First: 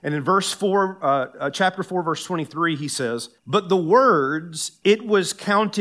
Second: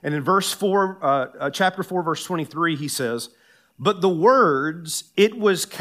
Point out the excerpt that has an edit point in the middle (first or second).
first